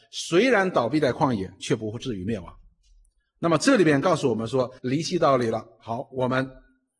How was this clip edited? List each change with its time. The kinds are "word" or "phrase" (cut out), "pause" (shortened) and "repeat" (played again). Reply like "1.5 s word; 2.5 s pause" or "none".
4.8 s pause